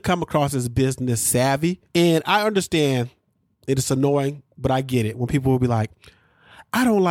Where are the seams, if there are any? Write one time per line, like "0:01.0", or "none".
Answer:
0:01.9